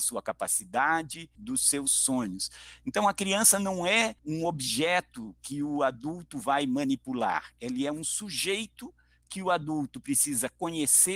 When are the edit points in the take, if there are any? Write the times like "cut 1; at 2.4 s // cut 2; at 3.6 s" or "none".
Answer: cut 1; at 1.3 s // cut 2; at 4.2 s